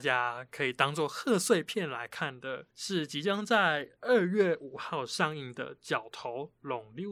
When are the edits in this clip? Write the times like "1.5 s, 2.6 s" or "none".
2.7 s